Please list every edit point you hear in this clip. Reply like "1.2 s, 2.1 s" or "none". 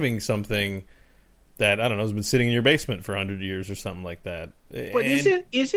none